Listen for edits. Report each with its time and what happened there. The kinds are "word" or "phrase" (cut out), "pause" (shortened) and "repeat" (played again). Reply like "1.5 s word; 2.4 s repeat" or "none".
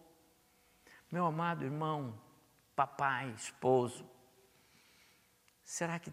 none